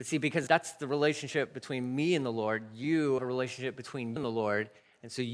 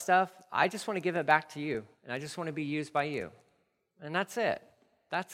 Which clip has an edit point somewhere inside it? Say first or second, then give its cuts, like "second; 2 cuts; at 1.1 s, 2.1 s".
first; 2 cuts; at 3.2 s, 4.2 s